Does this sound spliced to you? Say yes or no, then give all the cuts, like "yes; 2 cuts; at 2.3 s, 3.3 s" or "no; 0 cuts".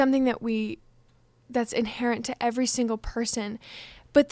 no; 0 cuts